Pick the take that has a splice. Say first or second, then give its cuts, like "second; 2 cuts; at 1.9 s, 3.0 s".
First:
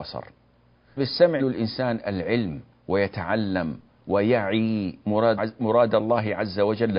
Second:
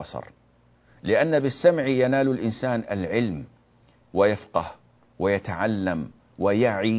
first; 4 cuts; at 1.0 s, 1.4 s, 2.8 s, 5.4 s